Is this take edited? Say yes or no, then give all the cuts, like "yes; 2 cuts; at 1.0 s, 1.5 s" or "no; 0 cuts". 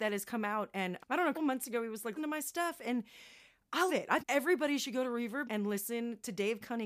yes; 6 cuts; at 1.0 s, 1.3 s, 2.2 s, 3.9 s, 4.2 s, 5.4 s